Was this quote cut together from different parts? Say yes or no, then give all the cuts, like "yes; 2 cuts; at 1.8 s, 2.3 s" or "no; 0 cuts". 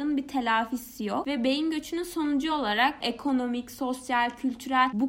no; 0 cuts